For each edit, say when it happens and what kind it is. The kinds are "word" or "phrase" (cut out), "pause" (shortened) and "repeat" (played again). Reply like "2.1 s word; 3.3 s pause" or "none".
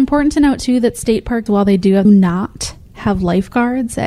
1.5 s word; 2.0 s phrase